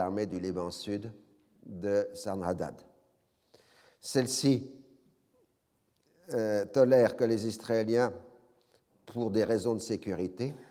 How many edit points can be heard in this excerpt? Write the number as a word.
zero